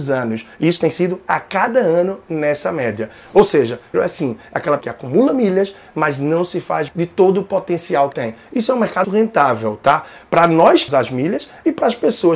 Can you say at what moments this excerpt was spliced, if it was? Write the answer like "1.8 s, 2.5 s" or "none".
3.9 s, 4.8 s, 6.9 s, 8.1 s, 9.0 s, 10.9 s